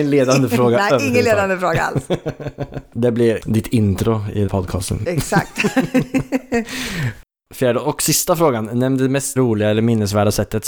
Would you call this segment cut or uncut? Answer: cut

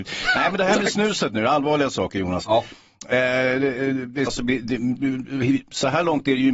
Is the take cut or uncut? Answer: cut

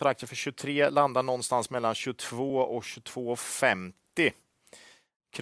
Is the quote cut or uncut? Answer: uncut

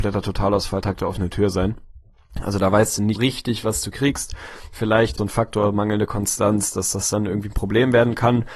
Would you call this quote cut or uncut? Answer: cut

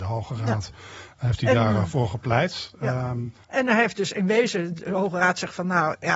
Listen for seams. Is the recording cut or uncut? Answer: cut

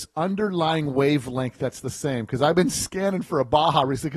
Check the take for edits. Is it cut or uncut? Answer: uncut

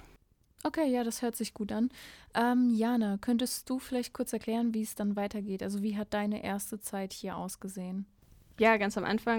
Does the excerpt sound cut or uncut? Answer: uncut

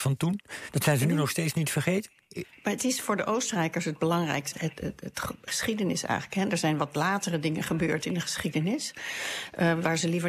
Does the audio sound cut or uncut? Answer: cut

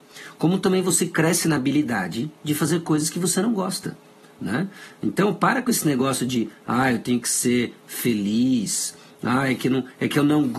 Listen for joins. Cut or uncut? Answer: uncut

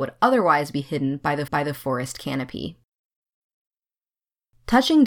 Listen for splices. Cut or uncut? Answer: cut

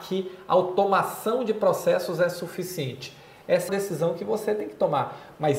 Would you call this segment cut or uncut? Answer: cut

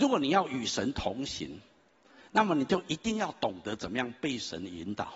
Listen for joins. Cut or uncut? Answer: uncut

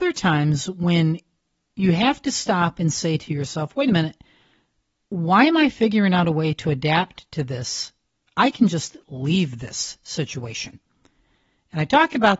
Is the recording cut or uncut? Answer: uncut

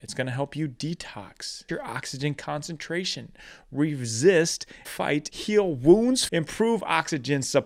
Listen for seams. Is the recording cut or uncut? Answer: cut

